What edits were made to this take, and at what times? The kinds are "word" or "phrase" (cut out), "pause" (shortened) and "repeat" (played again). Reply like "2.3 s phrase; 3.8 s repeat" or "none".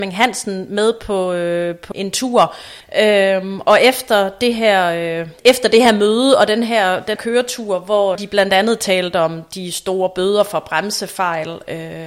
1.9 s word; 2.8 s pause; 5.4 s pause; 7.2 s word; 8.2 s phrase